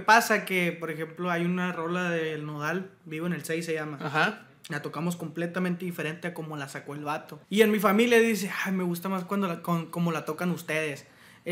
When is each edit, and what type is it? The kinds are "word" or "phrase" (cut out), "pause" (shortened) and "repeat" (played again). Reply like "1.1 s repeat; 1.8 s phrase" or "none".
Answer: 7.4 s pause